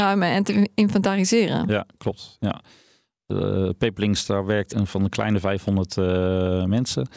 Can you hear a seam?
yes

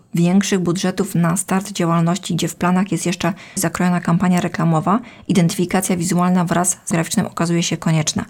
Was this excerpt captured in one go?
no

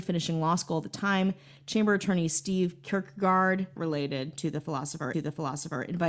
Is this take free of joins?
no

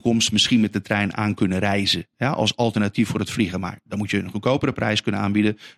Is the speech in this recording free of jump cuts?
yes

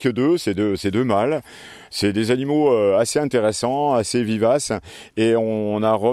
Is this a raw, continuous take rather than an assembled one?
yes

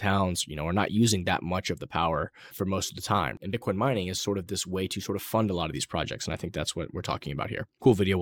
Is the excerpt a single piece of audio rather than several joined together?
no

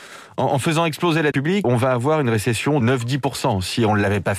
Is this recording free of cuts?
no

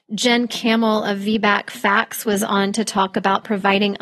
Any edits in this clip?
no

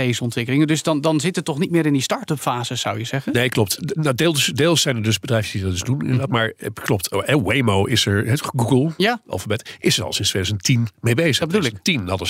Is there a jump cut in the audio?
no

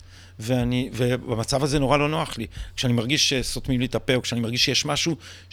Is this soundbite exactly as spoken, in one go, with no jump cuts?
yes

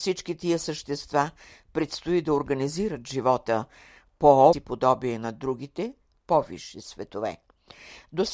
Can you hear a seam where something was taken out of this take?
yes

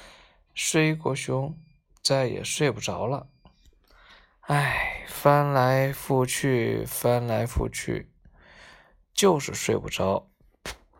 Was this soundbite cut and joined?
no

